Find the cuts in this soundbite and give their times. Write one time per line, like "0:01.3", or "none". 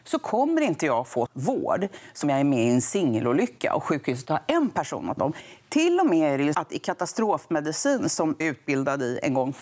0:01.3
0:02.2
0:05.2
0:06.5
0:08.4